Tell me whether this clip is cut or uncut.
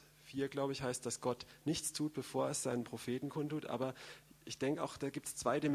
uncut